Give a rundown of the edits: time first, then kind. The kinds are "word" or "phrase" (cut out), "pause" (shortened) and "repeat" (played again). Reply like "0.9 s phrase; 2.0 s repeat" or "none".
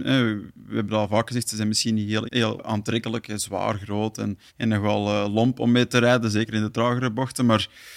2.3 s word; 2.6 s word; 4.5 s pause